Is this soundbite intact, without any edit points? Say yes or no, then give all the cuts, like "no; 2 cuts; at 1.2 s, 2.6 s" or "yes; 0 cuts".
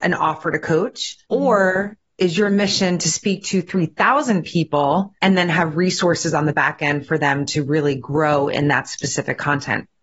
no; 2 cuts; at 1.2 s, 5.2 s